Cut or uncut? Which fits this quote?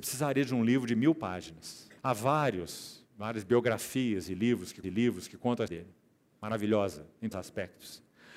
cut